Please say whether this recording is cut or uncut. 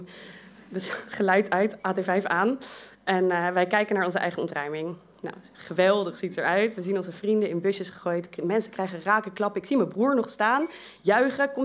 uncut